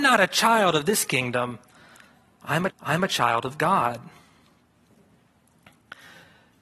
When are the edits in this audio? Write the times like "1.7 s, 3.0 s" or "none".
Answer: 2.7 s